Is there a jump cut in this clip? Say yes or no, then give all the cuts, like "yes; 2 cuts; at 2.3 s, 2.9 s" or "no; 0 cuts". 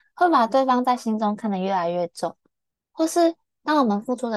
no; 0 cuts